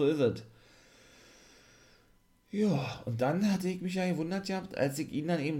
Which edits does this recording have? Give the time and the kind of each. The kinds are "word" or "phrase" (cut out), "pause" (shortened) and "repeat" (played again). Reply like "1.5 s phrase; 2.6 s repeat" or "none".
none